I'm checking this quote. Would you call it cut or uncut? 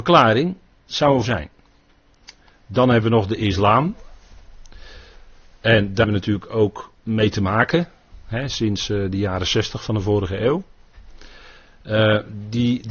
cut